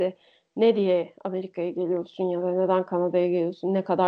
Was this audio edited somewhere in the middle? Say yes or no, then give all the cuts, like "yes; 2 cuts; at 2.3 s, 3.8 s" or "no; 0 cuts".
no; 0 cuts